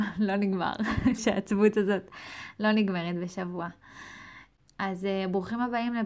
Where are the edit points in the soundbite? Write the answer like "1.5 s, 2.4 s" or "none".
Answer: 1.2 s